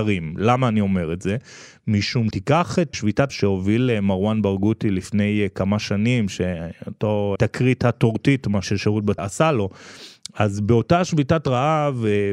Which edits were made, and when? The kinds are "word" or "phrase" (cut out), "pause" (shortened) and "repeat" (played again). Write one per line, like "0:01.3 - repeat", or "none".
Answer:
0:02.3 - word
0:02.9 - word
0:03.3 - word
0:07.4 - word
0:08.6 - word
0:09.2 - word